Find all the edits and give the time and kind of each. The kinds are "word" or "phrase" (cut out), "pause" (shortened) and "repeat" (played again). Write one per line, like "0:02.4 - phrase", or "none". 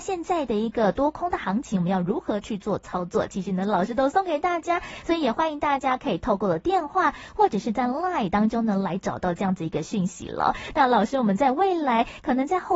0:08.3 - word